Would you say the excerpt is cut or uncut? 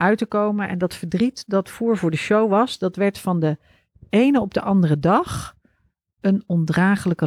uncut